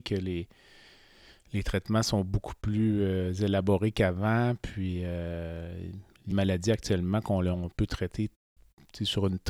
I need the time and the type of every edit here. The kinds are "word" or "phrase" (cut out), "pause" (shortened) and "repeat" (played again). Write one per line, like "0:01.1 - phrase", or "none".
0:06.3 - phrase